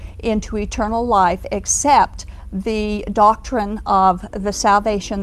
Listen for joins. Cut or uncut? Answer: uncut